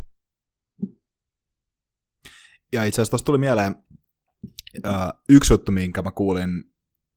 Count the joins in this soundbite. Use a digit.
0